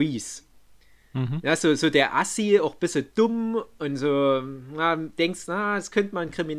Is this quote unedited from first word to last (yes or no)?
yes